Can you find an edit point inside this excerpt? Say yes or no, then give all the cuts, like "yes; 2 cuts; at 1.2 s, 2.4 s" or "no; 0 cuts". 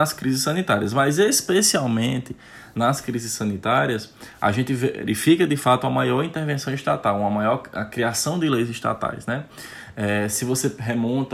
no; 0 cuts